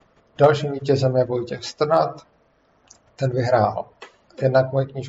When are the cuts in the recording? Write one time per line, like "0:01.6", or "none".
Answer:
none

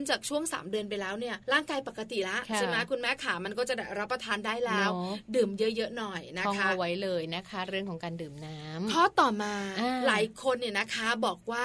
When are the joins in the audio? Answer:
0:01.4

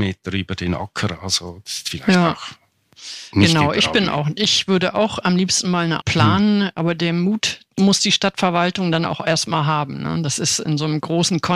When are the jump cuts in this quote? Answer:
0:06.0

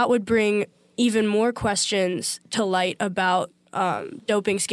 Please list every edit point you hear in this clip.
none

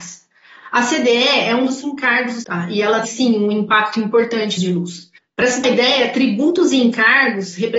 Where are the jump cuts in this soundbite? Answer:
0:01.8
0:02.4
0:03.0
0:04.6
0:05.2
0:05.6

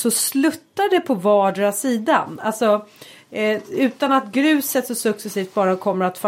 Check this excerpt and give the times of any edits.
none

